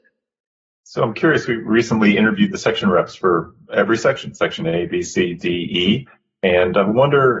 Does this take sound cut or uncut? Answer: uncut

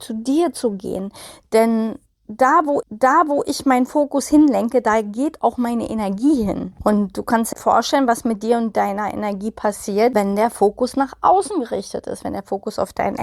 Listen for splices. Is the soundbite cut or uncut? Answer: cut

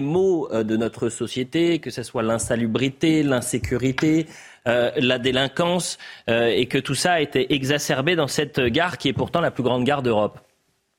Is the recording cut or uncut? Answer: uncut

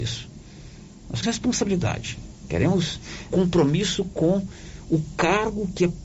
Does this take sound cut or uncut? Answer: cut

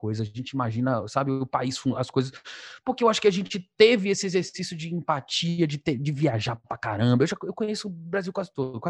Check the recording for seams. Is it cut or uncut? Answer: uncut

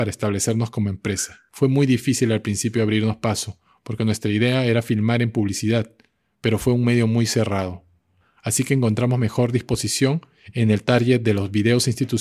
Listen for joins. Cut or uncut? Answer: uncut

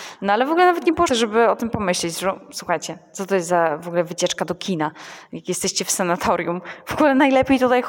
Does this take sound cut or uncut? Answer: cut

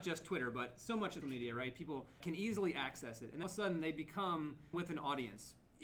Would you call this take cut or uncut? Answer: cut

